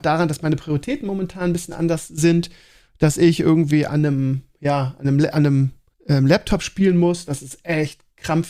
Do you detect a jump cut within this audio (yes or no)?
yes